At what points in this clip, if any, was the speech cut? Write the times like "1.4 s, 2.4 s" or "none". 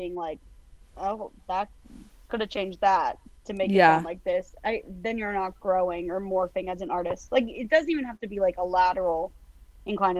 3.2 s